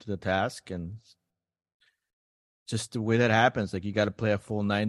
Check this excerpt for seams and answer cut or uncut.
uncut